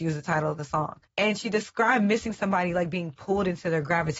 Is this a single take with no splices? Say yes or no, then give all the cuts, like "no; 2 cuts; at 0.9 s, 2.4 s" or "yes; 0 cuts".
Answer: no; 1 cut; at 1.1 s